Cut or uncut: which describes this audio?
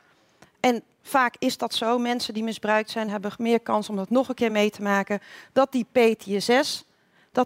uncut